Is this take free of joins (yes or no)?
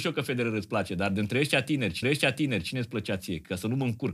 no